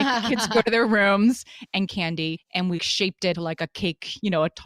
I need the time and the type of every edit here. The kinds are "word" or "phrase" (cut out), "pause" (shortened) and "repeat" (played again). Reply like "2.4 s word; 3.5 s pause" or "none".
1.9 s phrase; 2.8 s word; 3.3 s word